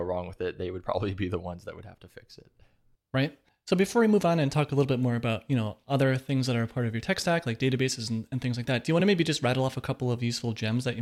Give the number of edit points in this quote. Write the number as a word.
zero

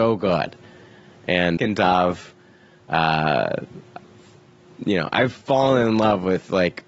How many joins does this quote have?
one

